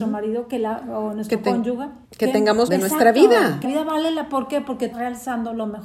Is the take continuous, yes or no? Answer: no